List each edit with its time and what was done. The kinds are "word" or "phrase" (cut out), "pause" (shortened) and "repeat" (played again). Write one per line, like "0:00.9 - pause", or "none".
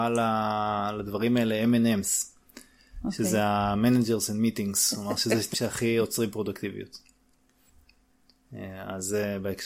0:05.5 - word